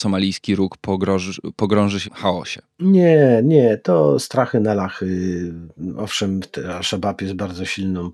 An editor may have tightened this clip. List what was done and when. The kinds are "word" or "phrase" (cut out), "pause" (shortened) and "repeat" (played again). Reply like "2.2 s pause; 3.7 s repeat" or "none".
2.0 s phrase